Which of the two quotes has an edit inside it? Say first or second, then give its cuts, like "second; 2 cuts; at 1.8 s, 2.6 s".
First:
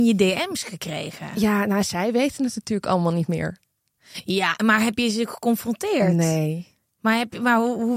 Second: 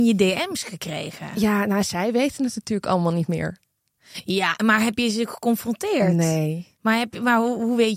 second; 1 cut; at 6.7 s